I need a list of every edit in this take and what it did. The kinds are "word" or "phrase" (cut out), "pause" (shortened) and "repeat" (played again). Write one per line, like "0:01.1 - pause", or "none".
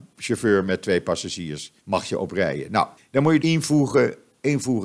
0:01.8 - pause
0:03.0 - pause
0:03.4 - word